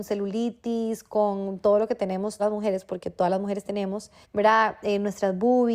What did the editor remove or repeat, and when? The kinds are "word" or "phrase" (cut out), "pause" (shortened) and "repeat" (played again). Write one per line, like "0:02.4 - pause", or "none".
0:02.4 - word
0:04.2 - pause